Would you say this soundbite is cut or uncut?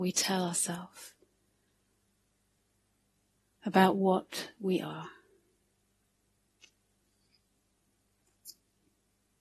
uncut